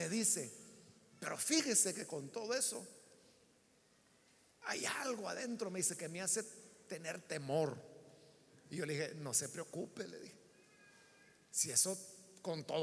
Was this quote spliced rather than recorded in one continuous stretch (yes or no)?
no